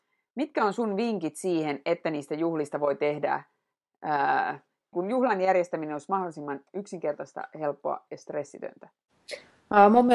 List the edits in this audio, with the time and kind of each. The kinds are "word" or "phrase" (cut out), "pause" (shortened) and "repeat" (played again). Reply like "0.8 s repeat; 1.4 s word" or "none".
4.9 s word